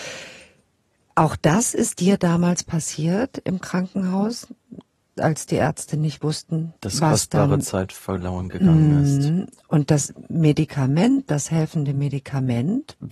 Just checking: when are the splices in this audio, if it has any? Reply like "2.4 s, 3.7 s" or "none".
6.8 s